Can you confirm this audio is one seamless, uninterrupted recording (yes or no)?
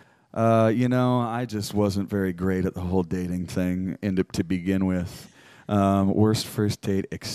yes